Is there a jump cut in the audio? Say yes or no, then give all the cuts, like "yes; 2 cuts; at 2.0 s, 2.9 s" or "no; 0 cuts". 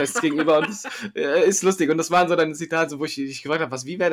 no; 0 cuts